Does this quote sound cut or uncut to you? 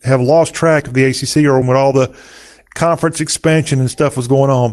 cut